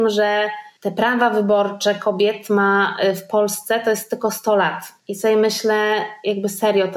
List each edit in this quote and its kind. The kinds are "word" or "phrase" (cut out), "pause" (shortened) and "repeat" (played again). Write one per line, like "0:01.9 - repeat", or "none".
0:05.0 - pause